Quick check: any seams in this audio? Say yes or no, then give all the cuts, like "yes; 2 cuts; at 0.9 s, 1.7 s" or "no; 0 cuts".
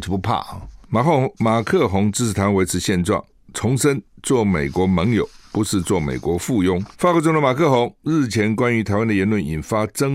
yes; 1 cut; at 6.9 s